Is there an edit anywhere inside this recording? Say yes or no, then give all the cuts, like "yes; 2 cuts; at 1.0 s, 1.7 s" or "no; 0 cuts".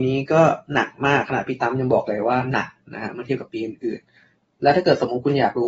no; 0 cuts